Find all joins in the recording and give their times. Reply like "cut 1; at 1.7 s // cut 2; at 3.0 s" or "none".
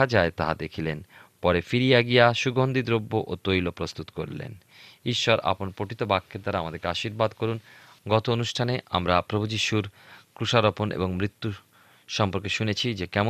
none